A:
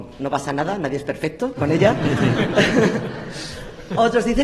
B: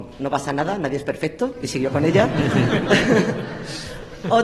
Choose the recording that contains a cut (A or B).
A